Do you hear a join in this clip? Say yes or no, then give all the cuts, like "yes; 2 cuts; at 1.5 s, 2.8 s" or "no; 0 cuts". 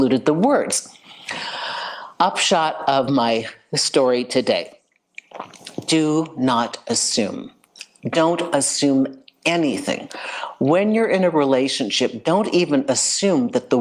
no; 0 cuts